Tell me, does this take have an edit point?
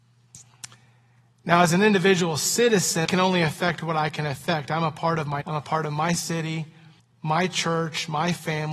yes; 3 cuts; at 3.0 s, 5.4 s, 7.0 s

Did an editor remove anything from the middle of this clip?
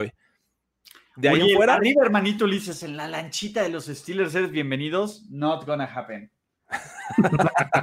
no; 0 cuts

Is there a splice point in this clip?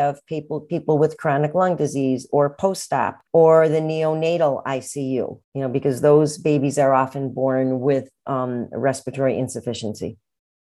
yes; 2 cuts; at 3.3 s, 5.4 s

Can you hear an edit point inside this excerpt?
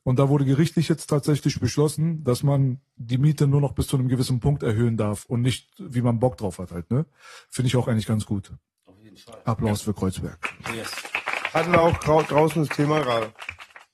no; 0 cuts

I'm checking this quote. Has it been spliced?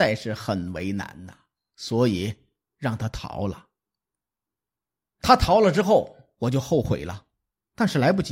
no; 0 cuts

